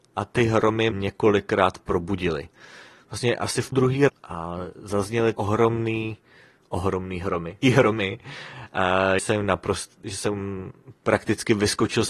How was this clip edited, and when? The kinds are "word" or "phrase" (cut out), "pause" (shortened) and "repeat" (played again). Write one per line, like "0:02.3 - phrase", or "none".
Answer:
0:00.9 - word
0:03.7 - word
0:04.1 - word
0:05.3 - word
0:07.6 - word
0:09.2 - word